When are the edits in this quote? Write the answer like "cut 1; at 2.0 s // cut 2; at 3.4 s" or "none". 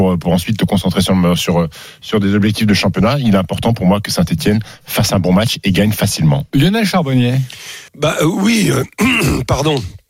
cut 1; at 7.9 s

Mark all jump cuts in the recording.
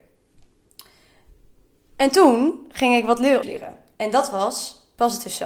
cut 1; at 3.4 s

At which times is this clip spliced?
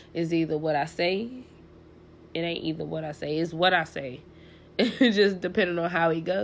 none

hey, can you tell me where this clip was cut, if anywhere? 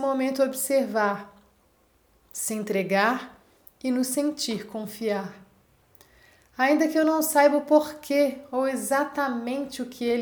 none

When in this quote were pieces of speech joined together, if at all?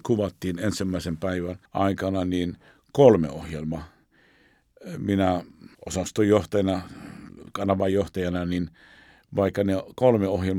cut 1; at 1.7 s // cut 2; at 5.7 s

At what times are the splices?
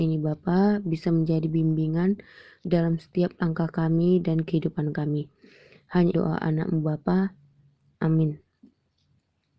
cut 1; at 6.1 s

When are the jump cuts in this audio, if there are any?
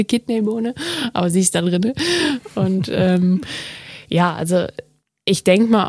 none

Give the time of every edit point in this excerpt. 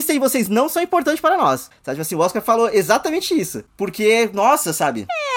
none

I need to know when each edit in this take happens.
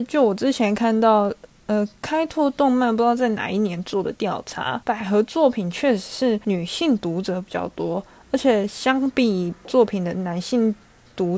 cut 1; at 9.6 s

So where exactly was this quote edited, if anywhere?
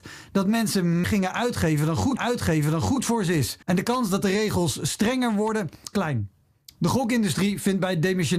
cut 1; at 1.0 s // cut 2; at 2.2 s // cut 3; at 3.6 s // cut 4; at 5.9 s

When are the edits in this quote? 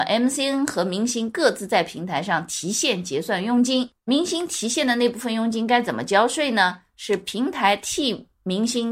cut 1; at 4.0 s

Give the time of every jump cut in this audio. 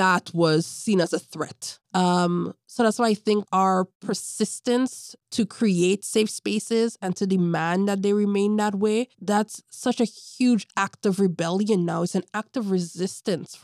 cut 1; at 1.8 s // cut 2; at 3.4 s // cut 3; at 9.1 s

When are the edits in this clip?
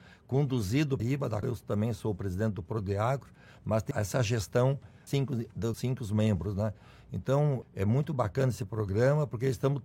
cut 1; at 1.0 s // cut 2; at 1.4 s // cut 3; at 3.9 s // cut 4; at 5.1 s // cut 5; at 5.7 s // cut 6; at 7.6 s

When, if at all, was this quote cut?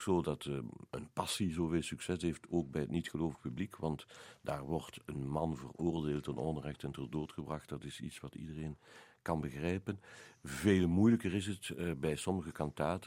none

